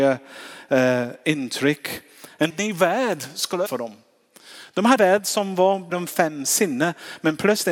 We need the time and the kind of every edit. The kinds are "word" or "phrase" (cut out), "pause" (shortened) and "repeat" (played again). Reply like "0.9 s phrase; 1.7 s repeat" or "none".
2.5 s word; 3.7 s word; 5.0 s word; 5.9 s word